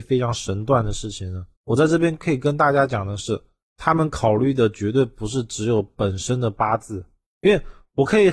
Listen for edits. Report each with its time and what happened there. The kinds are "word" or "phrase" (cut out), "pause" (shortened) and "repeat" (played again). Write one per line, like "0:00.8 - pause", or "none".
0:01.5 - pause